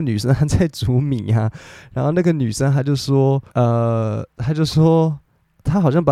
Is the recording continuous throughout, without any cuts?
no; 1 cut; at 3.5 s

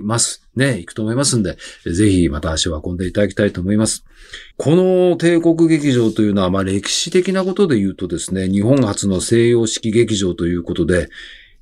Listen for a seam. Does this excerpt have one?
yes; 1 cut; at 4.5 s

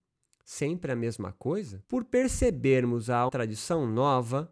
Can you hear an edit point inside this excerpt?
yes; 2 cuts; at 1.8 s, 3.3 s

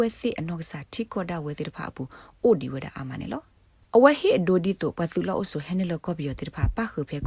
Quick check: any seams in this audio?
no; 0 cuts

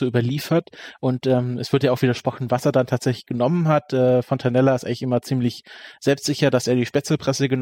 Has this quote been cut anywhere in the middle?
no; 0 cuts

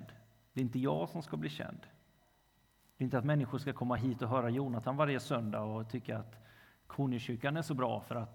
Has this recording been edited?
no; 0 cuts

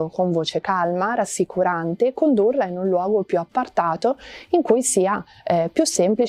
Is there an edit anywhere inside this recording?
no; 0 cuts

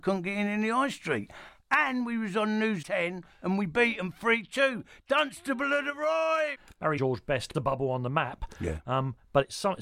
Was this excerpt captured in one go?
no; 3 cuts; at 2.8 s, 7.0 s, 7.5 s

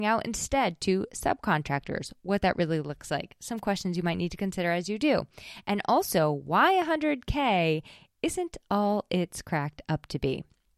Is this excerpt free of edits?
yes; 0 cuts

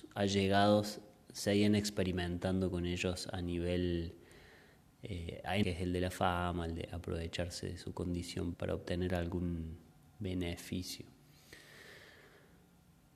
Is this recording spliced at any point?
yes; 2 cuts; at 5.6 s, 8.5 s

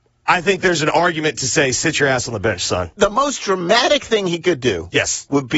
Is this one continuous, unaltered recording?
yes; 0 cuts

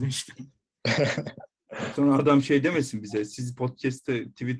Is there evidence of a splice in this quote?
no; 0 cuts

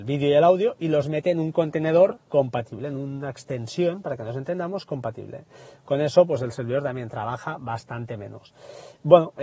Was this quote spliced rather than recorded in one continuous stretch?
yes; 1 cut; at 2.3 s

